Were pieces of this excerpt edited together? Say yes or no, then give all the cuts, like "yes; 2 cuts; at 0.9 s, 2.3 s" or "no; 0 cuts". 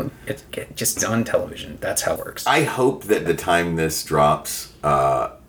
yes; 3 cuts; at 1.0 s, 2.2 s, 3.3 s